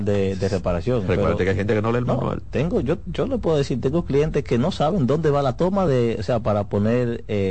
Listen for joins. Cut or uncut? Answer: uncut